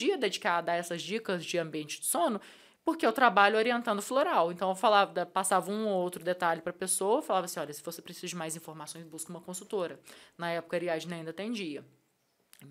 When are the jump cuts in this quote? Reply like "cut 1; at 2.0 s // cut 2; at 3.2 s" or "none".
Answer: none

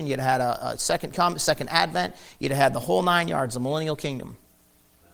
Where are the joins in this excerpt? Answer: none

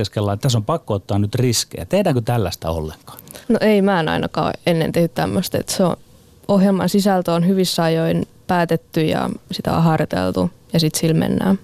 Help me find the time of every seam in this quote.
cut 1; at 3.4 s

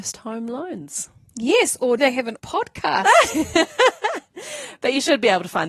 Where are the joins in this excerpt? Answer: cut 1; at 2.0 s // cut 2; at 2.4 s

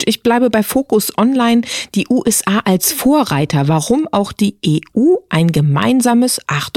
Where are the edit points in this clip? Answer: none

